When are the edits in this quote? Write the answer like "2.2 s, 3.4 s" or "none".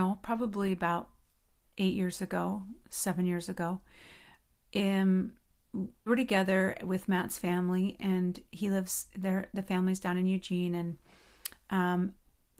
6.1 s

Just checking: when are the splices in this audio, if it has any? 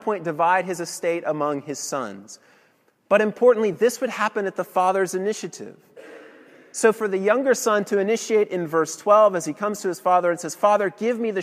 none

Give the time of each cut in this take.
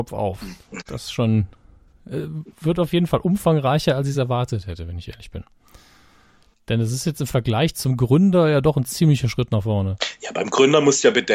none

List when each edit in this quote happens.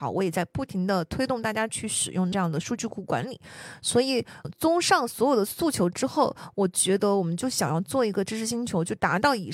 2.3 s, 4.4 s

